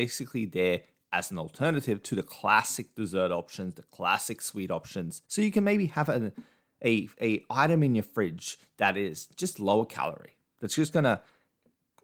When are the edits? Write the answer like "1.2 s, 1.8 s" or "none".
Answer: 5.2 s